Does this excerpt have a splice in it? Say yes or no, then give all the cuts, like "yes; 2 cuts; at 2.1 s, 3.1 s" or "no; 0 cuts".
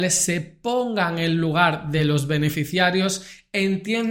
no; 0 cuts